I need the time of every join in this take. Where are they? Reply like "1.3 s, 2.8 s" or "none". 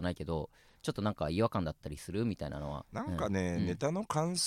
2.9 s